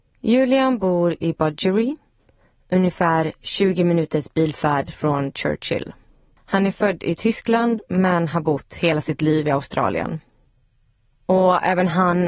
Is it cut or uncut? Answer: uncut